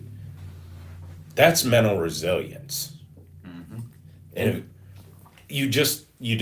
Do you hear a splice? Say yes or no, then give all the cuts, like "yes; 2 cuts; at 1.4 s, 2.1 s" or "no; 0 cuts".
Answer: no; 0 cuts